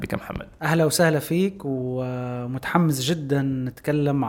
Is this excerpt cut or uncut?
uncut